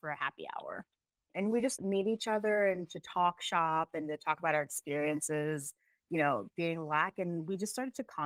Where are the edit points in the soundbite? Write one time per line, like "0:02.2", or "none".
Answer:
0:01.8